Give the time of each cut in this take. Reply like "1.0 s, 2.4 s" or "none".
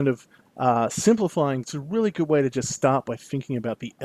1.6 s